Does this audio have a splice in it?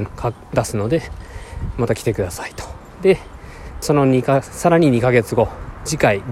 yes; 1 cut; at 3.8 s

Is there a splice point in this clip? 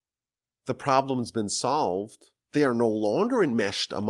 no; 0 cuts

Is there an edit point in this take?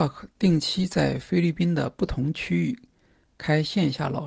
no; 0 cuts

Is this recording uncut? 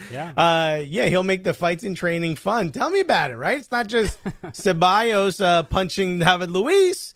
yes; 0 cuts

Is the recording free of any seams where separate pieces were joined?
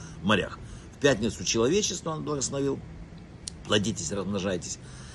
yes; 0 cuts

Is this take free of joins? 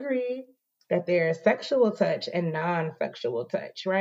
yes; 0 cuts

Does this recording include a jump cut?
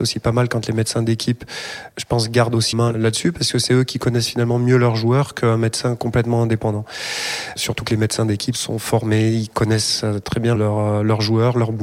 yes; 3 cuts; at 1.9 s, 2.7 s, 10.6 s

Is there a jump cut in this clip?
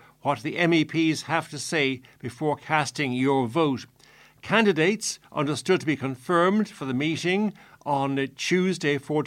no; 0 cuts

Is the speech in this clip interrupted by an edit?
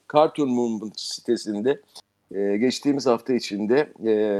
no; 0 cuts

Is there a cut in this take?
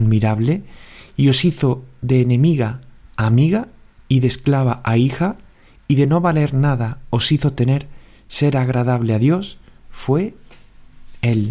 no; 0 cuts

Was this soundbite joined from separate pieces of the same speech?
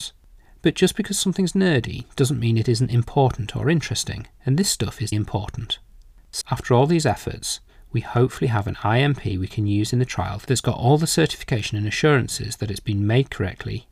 yes; 3 cuts; at 4.3 s, 5.1 s, 6.4 s

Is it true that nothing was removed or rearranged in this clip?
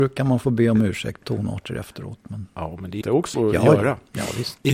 no; 3 cuts; at 1.2 s, 3.0 s, 3.3 s

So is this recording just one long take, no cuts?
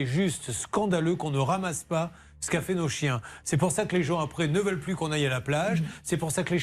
yes; 0 cuts

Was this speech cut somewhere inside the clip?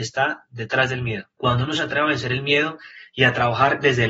yes; 1 cut; at 1.3 s

